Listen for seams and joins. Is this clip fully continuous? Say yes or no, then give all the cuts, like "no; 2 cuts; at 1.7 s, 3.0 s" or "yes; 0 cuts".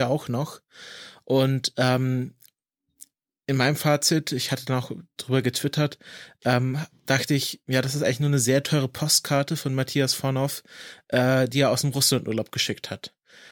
yes; 0 cuts